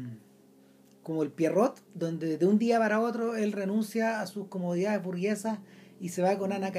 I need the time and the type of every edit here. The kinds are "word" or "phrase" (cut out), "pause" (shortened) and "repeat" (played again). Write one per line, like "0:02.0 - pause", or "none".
0:01.8 - pause